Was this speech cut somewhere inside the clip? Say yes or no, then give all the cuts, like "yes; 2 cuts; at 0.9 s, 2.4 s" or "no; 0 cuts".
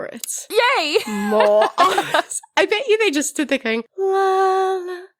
no; 0 cuts